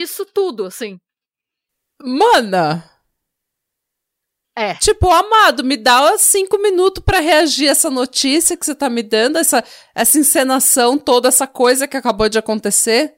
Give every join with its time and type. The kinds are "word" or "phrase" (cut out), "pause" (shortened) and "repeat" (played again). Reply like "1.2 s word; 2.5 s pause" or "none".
none